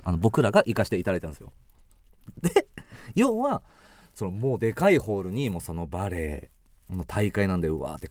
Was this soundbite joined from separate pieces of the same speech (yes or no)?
no